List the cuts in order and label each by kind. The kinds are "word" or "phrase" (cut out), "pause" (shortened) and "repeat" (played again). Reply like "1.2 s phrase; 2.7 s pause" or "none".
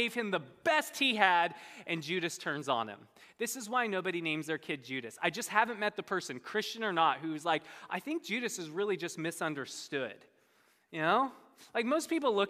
none

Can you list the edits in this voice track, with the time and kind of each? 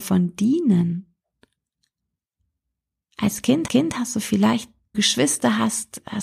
3.7 s repeat; 4.9 s phrase

